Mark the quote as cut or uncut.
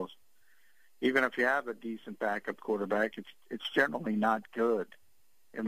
uncut